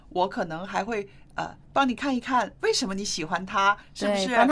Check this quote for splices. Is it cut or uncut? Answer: cut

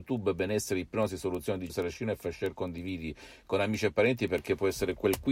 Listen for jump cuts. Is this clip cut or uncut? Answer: cut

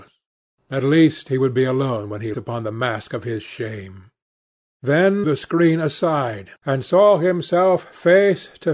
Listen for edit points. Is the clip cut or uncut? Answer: cut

